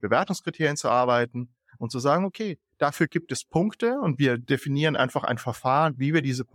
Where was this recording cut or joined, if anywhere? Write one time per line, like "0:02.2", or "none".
none